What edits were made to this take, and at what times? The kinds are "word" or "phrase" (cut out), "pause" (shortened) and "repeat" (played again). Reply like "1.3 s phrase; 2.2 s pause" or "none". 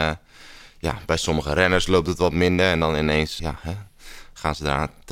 3.4 s word